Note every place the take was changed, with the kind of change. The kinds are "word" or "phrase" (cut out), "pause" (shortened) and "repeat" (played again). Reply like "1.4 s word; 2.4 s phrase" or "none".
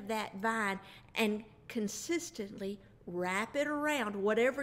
none